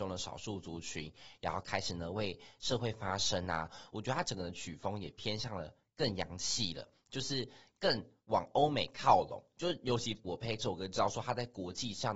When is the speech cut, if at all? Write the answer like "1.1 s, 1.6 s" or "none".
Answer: 10.2 s